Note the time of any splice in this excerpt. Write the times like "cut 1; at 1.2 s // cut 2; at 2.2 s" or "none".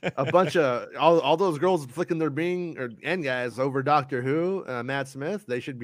none